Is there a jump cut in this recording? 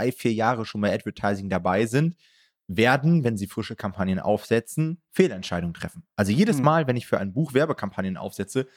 no; 0 cuts

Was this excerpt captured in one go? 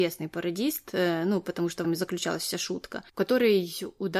no; 1 cut; at 1.8 s

